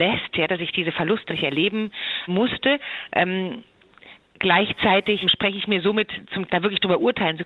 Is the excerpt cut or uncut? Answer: cut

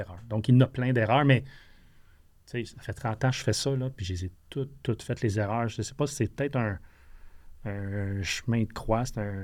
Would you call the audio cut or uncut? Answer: uncut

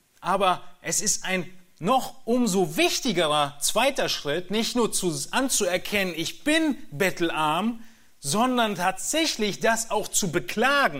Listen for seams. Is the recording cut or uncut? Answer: uncut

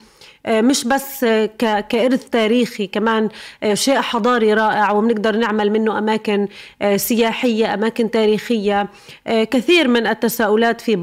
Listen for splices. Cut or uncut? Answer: uncut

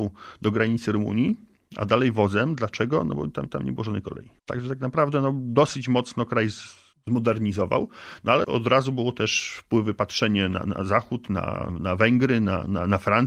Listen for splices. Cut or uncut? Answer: cut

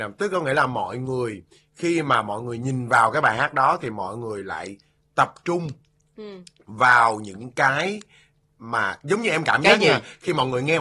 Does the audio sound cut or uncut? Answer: uncut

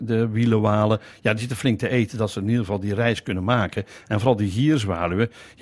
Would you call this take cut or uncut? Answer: uncut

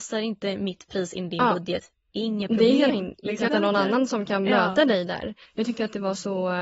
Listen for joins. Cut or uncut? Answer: cut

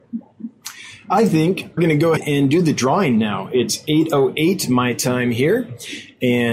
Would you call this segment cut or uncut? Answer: cut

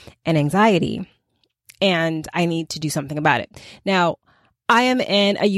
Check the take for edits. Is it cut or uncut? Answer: uncut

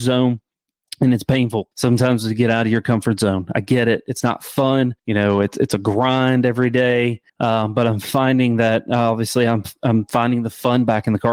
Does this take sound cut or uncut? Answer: cut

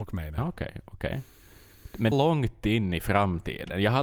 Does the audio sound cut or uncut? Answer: cut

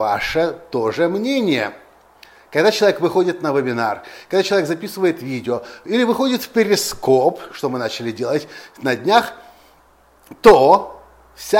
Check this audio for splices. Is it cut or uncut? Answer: uncut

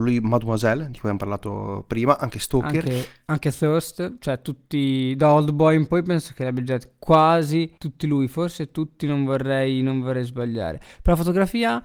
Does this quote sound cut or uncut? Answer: cut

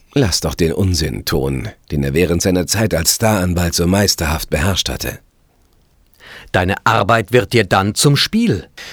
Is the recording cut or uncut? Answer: cut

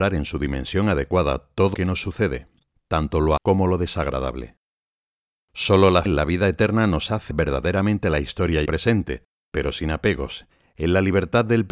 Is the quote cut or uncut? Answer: cut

